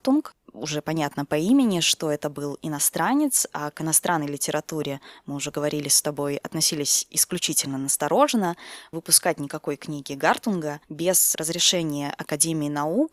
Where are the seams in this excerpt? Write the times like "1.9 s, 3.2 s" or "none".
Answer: 8.9 s, 10.8 s